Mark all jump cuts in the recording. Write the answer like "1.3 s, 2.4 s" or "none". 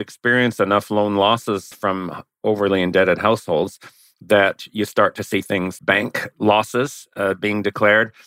1.7 s, 5.8 s